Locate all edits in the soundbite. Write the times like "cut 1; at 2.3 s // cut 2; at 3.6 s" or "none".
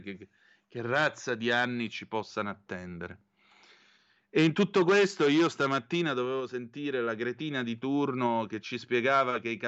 none